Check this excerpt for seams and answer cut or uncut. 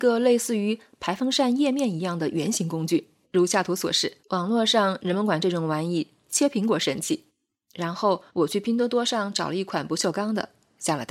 cut